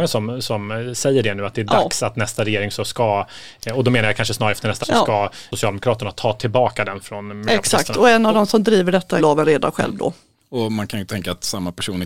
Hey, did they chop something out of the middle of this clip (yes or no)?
yes